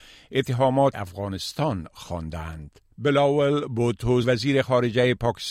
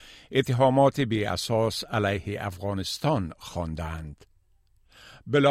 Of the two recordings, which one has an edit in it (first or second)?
first